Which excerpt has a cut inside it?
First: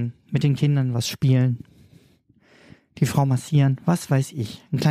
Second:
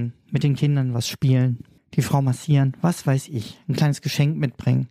second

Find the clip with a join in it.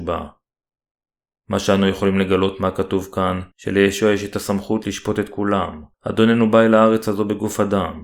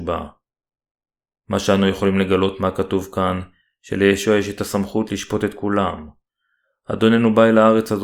first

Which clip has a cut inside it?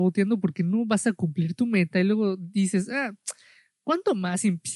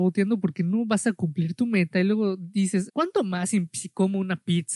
second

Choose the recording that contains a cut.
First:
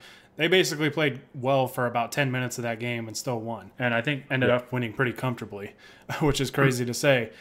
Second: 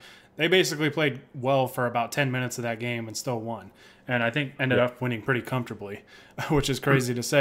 first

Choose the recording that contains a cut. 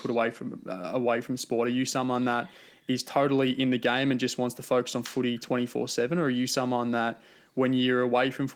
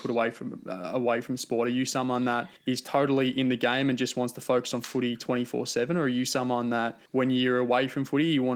second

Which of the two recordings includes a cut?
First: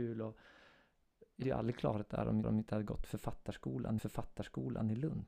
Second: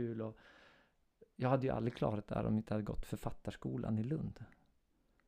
first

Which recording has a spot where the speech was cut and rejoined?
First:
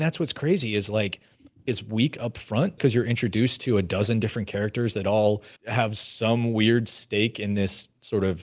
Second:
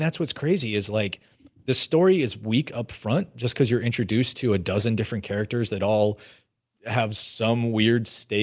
first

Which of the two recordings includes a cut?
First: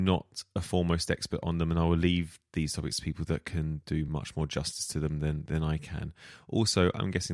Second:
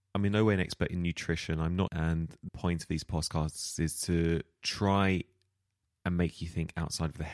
second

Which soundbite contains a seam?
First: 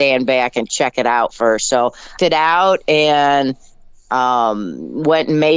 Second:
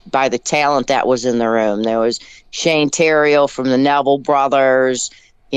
first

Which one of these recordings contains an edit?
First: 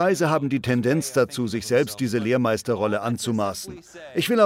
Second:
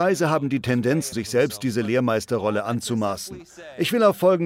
second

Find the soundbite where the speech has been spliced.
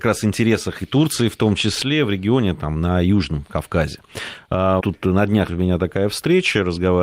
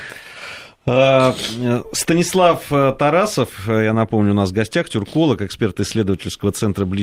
first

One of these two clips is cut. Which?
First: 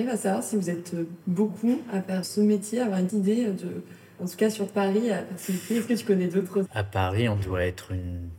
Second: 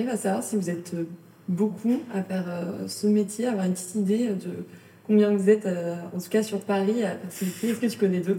first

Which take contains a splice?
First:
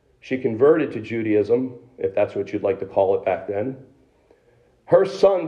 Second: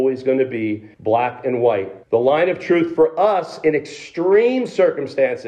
second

